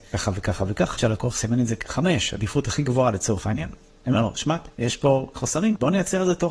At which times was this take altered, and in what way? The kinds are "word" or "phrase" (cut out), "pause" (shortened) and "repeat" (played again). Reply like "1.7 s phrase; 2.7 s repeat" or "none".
1.0 s word; 4.7 s pause; 5.4 s word